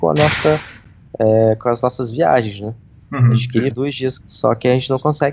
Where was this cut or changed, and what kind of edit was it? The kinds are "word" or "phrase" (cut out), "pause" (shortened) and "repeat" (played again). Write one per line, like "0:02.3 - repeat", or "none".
0:03.7 - word
0:04.2 - word